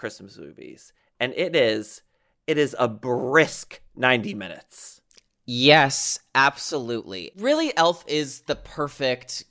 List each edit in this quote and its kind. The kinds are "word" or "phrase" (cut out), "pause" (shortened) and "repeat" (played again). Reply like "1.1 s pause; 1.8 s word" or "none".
none